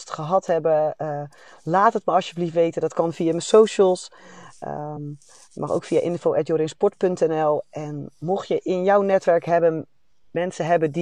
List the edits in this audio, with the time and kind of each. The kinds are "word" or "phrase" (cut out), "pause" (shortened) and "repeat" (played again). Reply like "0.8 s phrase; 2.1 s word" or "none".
none